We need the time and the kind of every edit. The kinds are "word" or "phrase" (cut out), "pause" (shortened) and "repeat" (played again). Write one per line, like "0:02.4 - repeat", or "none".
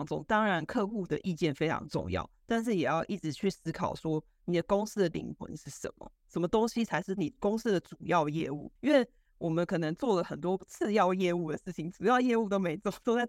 0:08.8 - pause

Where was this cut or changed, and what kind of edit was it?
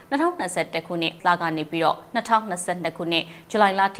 0:01.2 - word

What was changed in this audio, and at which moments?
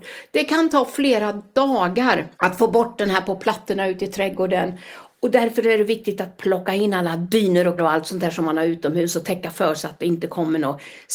0:02.3 - pause
0:07.8 - word

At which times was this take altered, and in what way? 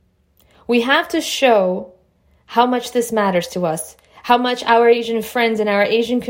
none

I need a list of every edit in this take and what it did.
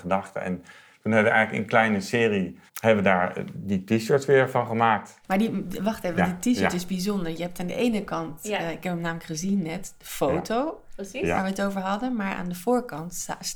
0:02.7 - pause
0:05.2 - pause

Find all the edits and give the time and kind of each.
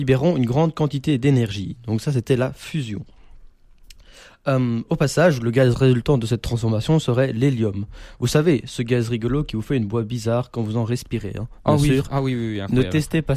none

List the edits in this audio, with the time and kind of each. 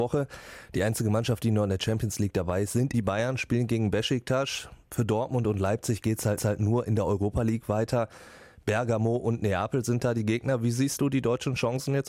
0:02.9 - word
0:06.4 - repeat

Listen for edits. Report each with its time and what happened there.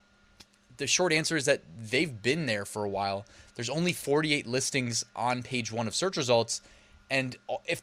none

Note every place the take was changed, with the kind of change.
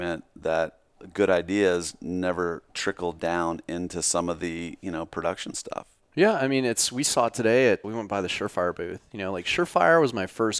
0:02.7 - pause
0:07.8 - word

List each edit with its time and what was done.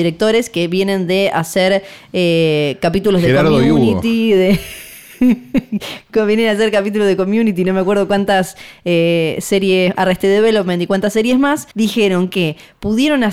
0:11.7 - pause

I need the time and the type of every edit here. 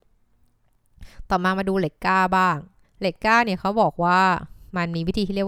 0:02.8 - pause

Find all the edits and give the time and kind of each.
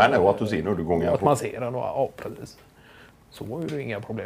none

